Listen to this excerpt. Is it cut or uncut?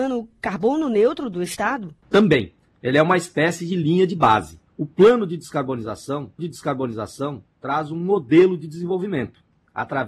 cut